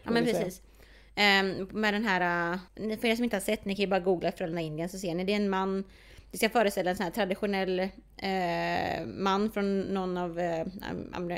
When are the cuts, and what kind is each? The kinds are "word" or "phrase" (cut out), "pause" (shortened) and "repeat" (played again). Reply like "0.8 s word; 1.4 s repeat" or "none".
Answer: 2.7 s pause